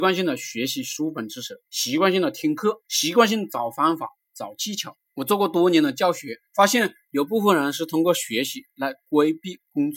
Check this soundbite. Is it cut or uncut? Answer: cut